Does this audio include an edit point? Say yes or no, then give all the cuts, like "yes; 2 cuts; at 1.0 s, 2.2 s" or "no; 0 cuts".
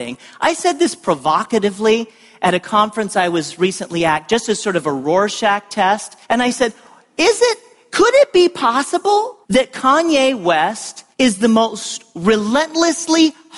yes; 3 cuts; at 6.2 s, 9.4 s, 11.1 s